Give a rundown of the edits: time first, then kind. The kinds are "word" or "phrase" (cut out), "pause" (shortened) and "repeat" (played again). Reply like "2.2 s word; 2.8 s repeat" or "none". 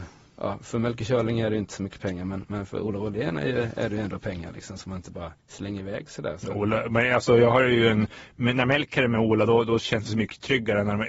5.4 s pause